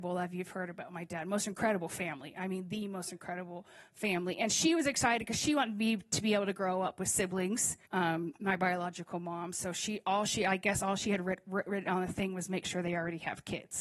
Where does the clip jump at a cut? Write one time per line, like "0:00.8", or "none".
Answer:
0:07.9